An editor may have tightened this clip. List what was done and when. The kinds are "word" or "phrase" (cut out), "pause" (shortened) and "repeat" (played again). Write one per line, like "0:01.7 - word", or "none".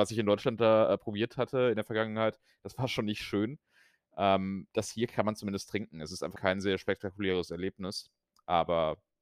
0:06.3 - word